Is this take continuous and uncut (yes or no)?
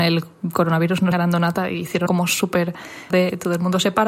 no